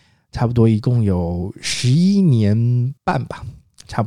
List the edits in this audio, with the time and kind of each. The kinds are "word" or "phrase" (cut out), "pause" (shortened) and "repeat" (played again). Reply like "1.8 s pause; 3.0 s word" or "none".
3.0 s pause